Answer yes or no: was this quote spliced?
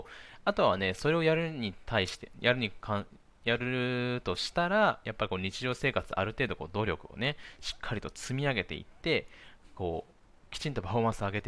no